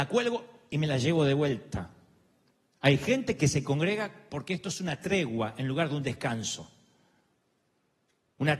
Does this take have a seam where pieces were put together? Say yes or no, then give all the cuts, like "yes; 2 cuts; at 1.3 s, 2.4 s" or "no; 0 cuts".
no; 0 cuts